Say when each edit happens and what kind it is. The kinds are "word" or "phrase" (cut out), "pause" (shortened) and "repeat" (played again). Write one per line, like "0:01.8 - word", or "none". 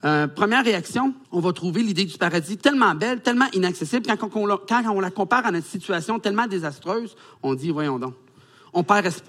0:01.2 - pause